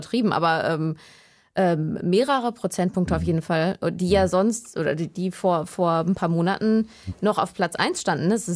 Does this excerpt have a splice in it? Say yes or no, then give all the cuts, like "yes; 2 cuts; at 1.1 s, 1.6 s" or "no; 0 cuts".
no; 0 cuts